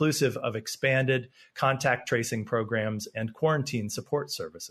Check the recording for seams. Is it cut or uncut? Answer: uncut